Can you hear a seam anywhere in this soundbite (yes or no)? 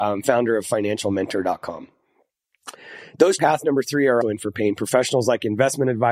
yes